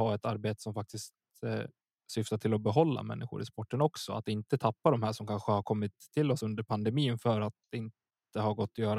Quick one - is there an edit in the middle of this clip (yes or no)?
no